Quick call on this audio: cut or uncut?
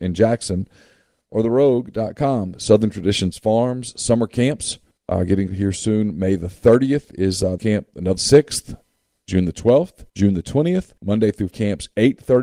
cut